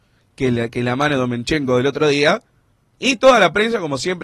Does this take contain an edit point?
no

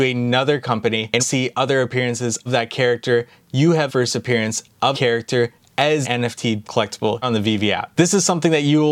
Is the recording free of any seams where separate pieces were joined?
no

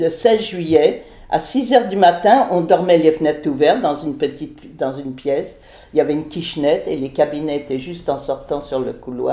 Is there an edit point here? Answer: no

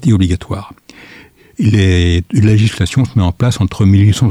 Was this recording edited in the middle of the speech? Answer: no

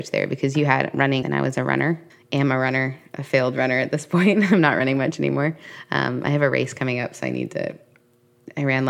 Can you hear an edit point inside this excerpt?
yes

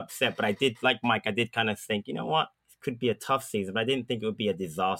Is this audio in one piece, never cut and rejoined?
no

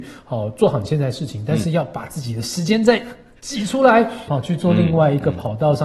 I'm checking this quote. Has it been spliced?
yes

